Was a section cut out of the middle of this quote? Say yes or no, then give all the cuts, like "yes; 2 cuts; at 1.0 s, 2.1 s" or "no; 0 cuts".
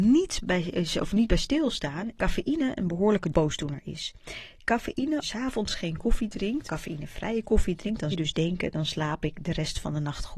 yes; 4 cuts; at 2.2 s, 5.2 s, 6.6 s, 8.1 s